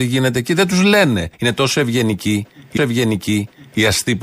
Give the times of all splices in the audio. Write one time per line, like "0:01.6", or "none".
0:01.3
0:02.8

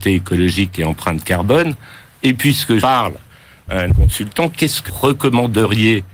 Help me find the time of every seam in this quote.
0:02.8
0:03.9
0:04.9

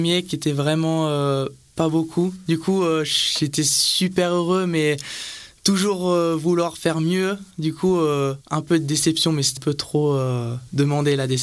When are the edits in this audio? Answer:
0:08.4
0:09.6

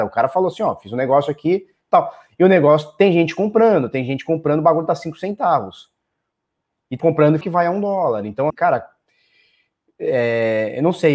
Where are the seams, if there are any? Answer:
0:07.0
0:07.4
0:08.5

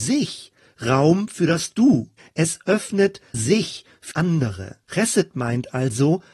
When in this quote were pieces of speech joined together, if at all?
0:02.2
0:03.3
0:04.1
0:04.8

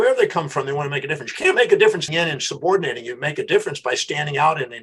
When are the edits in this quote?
0:02.1

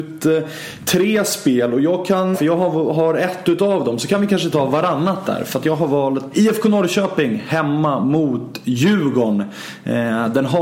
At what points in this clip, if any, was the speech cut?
0:02.3
0:06.3

